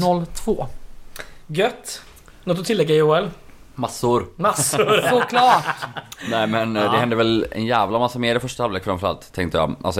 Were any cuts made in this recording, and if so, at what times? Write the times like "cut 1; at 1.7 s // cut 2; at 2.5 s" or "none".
none